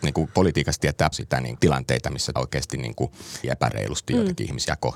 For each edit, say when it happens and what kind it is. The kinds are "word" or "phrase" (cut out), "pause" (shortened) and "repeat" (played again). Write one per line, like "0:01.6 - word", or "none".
0:01.1 - word
0:01.6 - word
0:02.4 - word
0:03.4 - word

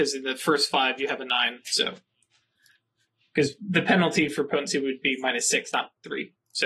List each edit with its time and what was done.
none

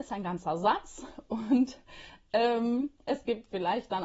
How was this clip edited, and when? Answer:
0:03.0 - pause

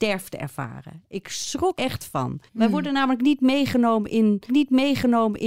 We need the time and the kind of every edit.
0:01.7 - word
0:02.5 - pause
0:04.5 - repeat

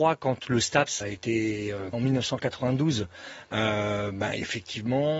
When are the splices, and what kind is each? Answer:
0:01.0 - word
0:01.9 - word

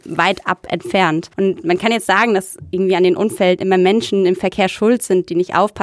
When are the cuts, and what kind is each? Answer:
0:01.3 - pause

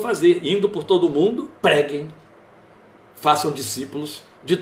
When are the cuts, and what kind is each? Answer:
0:01.6 - pause

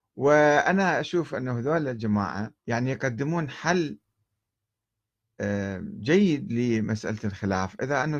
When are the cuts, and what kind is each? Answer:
0:02.6 - pause

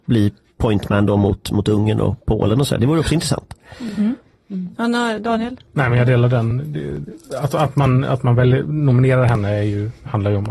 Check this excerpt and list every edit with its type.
none

